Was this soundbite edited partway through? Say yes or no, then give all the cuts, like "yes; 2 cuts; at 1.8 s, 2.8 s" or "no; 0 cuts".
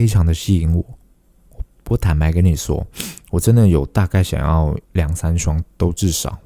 yes; 1 cut; at 4.8 s